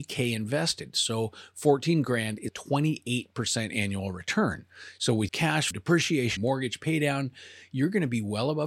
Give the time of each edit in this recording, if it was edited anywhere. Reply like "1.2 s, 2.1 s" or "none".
2.5 s, 5.3 s, 5.7 s, 6.4 s